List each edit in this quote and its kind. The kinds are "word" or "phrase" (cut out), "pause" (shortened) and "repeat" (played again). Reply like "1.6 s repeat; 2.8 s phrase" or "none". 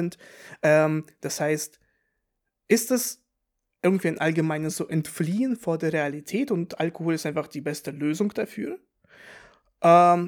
none